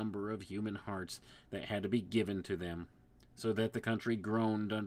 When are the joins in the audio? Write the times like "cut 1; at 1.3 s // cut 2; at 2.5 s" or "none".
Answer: none